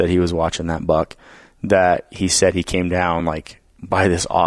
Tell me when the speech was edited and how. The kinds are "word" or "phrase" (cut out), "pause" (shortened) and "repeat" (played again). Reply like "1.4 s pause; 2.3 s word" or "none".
none